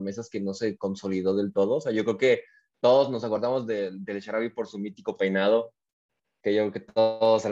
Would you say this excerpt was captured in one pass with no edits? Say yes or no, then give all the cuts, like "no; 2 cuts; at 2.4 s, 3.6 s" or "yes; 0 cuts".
yes; 0 cuts